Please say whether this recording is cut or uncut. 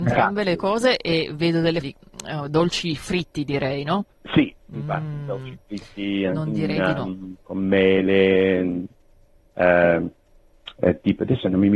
cut